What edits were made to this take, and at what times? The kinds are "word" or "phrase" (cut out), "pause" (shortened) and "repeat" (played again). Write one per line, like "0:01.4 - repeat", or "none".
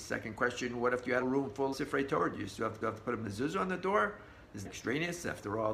0:01.2 - word
0:01.7 - word
0:02.8 - repeat
0:04.6 - word